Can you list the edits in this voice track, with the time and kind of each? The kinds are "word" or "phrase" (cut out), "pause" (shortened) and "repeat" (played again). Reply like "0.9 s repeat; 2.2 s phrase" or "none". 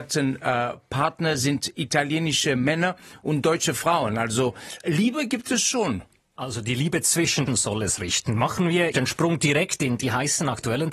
4.8 s word; 7.5 s phrase; 8.9 s phrase